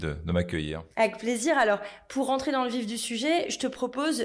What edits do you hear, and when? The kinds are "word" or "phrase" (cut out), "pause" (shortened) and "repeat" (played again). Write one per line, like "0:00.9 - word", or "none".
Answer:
0:00.9 - pause